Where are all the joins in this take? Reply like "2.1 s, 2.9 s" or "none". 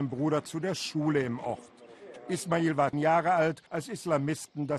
2.9 s, 3.7 s